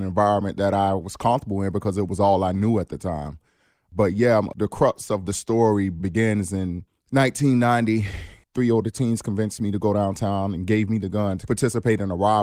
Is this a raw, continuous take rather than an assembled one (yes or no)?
yes